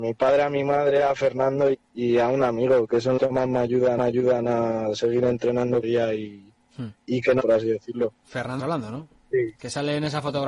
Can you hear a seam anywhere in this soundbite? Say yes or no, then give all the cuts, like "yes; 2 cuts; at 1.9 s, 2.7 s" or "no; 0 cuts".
yes; 7 cuts; at 1.7 s, 3.2 s, 4.0 s, 5.8 s, 7.0 s, 7.4 s, 8.6 s